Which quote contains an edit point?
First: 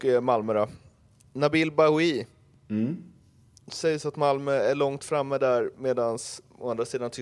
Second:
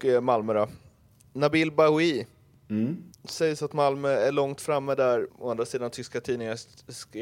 second; 2 cuts; at 3.1 s, 5.3 s

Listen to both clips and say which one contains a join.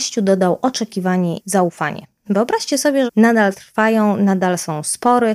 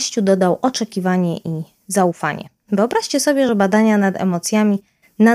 first; 2 cuts; at 1.4 s, 3.1 s

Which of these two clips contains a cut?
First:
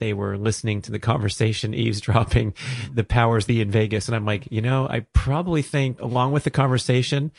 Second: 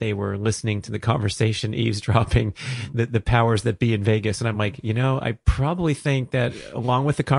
first; 3 cuts; at 2.9 s, 3.5 s, 6.0 s

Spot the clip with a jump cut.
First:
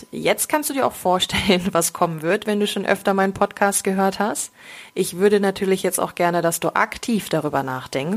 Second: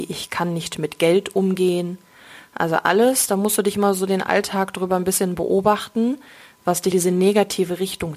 second; 1 cut; at 6.9 s

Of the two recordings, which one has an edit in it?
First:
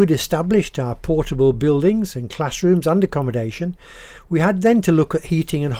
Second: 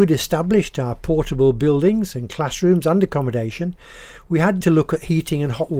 second; 1 cut; at 4.6 s

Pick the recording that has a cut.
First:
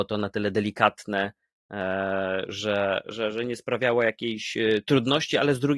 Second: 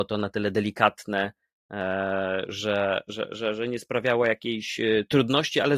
first; 1 cut; at 3.0 s

